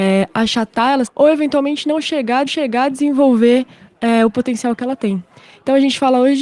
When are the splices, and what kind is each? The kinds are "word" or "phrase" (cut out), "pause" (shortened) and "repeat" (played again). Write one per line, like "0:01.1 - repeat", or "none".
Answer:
0:01.1 - word
0:02.5 - repeat